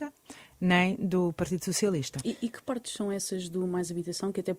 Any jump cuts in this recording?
no; 0 cuts

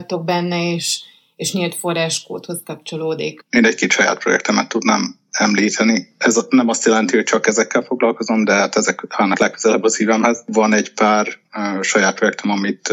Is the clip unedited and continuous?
yes; 0 cuts

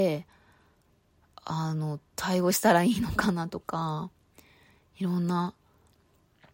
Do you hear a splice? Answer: no; 0 cuts

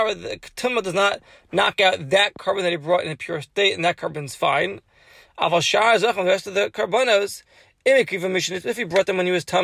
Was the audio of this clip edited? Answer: no; 0 cuts

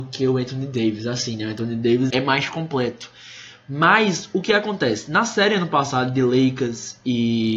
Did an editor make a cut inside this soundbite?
yes; 1 cut; at 2.1 s

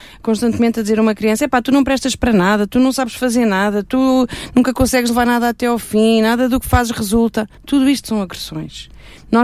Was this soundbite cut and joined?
yes; 1 cut; at 7.6 s

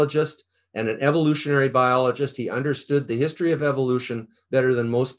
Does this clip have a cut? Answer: no; 0 cuts

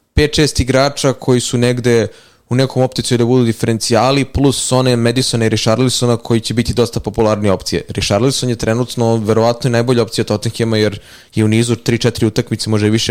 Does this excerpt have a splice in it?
no; 0 cuts

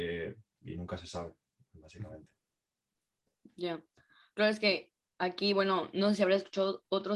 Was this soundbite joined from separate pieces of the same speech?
no; 0 cuts

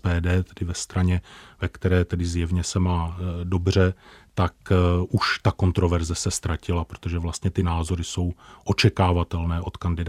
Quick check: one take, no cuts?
yes; 0 cuts

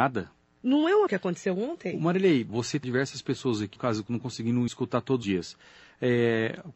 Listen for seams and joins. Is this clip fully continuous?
no; 6 cuts; at 1.1 s, 2.5 s, 2.8 s, 3.8 s, 4.7 s, 5.2 s

